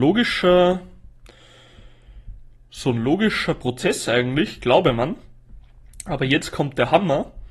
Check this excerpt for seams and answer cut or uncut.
uncut